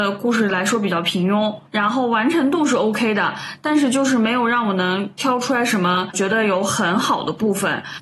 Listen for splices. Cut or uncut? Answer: uncut